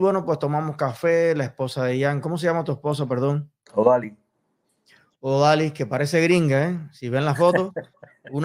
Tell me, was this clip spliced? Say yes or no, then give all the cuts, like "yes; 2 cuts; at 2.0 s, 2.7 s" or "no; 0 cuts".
no; 0 cuts